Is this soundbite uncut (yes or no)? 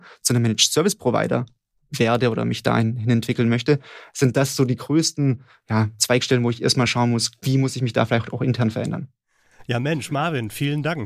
yes